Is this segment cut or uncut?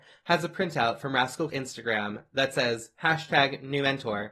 cut